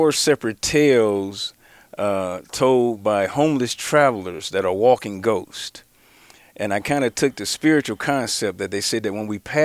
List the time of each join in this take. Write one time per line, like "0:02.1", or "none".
none